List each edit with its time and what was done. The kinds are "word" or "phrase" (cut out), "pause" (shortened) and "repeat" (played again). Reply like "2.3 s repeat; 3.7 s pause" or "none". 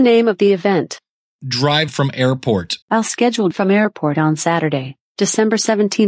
1.9 s word; 2.8 s pause; 3.5 s phrase